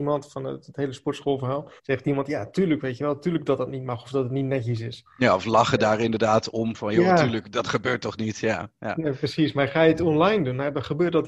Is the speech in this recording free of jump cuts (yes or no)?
no